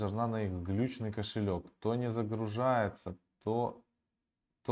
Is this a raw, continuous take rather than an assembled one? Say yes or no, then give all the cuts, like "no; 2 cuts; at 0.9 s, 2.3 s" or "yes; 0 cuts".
yes; 0 cuts